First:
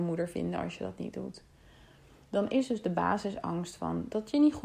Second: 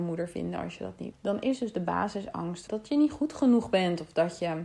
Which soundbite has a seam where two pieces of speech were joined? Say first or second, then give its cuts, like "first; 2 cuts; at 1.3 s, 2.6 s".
second; 2 cuts; at 1.1 s, 2.7 s